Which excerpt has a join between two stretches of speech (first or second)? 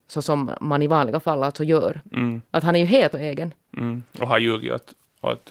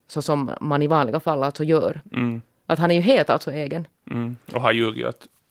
first